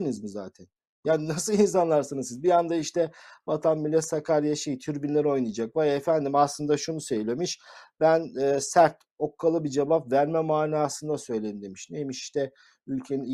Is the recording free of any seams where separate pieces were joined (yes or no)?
yes